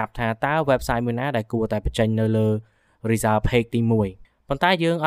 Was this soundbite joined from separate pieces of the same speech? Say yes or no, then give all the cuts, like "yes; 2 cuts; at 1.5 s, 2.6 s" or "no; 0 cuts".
no; 0 cuts